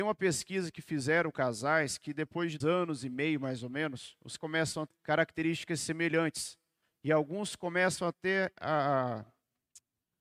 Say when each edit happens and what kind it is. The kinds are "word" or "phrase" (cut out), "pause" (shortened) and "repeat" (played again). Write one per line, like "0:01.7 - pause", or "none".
0:01.3 - word
0:02.6 - word
0:04.4 - word
0:04.9 - word